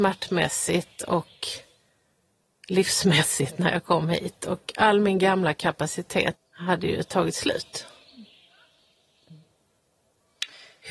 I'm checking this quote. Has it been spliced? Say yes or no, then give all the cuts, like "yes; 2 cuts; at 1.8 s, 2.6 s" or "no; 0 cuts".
yes; 1 cut; at 6.4 s